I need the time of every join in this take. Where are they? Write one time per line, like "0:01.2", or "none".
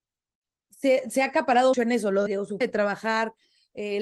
0:01.7
0:02.3
0:02.6